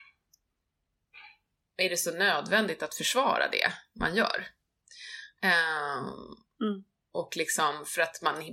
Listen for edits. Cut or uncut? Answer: uncut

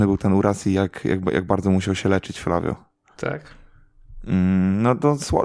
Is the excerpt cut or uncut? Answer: uncut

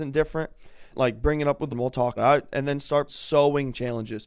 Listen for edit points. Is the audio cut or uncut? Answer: cut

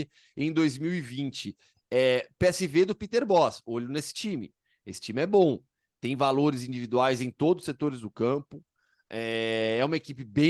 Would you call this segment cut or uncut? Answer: uncut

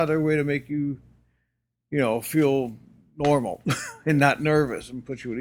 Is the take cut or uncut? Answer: uncut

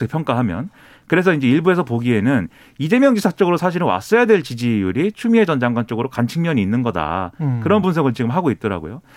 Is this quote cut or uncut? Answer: uncut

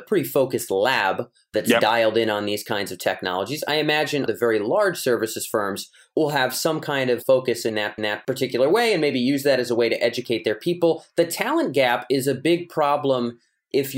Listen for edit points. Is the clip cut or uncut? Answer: cut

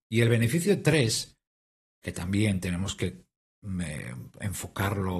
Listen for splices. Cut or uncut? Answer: uncut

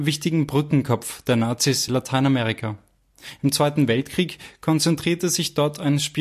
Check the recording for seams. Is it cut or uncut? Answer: cut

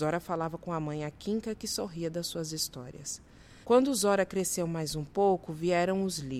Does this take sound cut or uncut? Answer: cut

